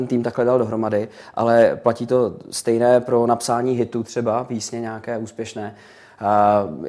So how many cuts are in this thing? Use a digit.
0